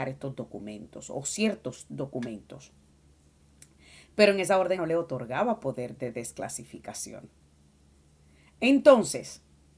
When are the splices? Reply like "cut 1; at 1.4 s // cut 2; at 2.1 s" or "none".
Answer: cut 1; at 4.8 s